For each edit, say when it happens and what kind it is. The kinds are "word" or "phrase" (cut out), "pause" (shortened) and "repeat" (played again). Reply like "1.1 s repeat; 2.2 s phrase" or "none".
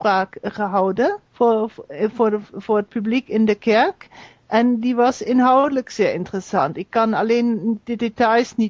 1.3 s pause